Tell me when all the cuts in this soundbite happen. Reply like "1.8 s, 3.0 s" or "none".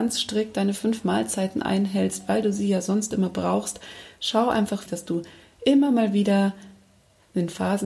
4.9 s